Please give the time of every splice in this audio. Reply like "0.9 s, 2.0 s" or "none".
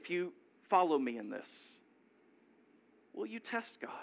none